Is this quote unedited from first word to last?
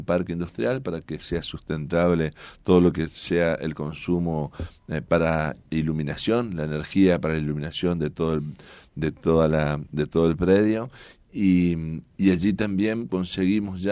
yes; 0 cuts

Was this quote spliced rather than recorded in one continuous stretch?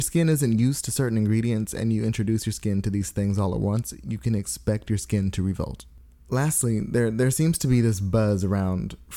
no; 0 cuts

